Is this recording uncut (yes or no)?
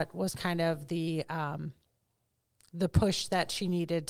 yes